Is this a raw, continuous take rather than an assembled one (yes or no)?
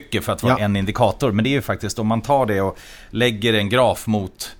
yes